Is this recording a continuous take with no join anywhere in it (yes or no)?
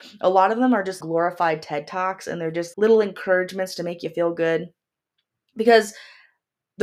no